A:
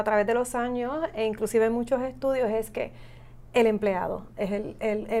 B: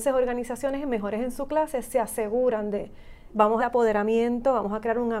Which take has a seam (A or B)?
B